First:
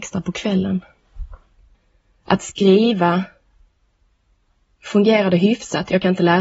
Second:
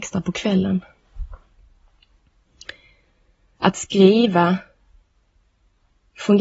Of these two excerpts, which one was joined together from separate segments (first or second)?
first